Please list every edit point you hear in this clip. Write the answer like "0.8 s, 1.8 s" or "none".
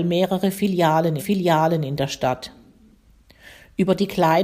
1.2 s